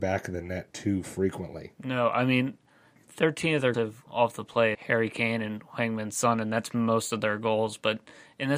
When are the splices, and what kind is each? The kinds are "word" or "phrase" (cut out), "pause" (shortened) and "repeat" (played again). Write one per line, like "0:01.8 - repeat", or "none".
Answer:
0:03.0 - word
0:03.7 - word
0:04.1 - word
0:04.7 - word